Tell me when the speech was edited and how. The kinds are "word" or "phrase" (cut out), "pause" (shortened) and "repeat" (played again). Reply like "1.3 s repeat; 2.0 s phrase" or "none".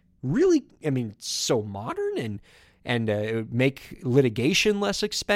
none